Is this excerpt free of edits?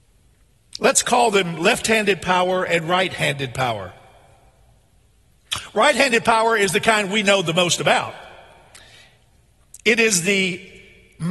yes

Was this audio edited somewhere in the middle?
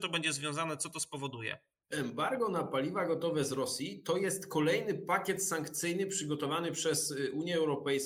no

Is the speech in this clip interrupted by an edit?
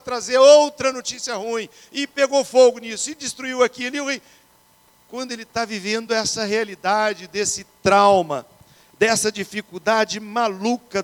no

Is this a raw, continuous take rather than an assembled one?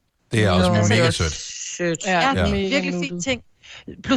yes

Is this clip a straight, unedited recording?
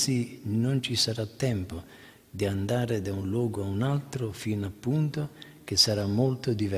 yes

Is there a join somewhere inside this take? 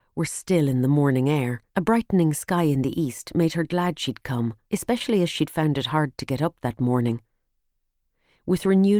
yes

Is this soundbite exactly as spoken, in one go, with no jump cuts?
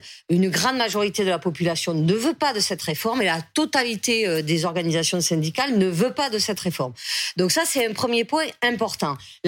yes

